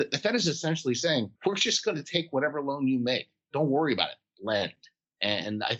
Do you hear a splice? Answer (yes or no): yes